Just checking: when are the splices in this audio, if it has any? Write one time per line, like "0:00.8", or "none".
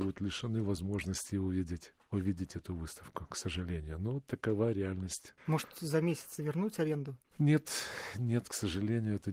0:05.4